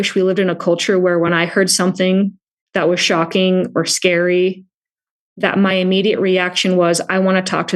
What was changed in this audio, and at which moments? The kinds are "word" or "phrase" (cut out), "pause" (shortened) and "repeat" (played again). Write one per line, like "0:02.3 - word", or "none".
none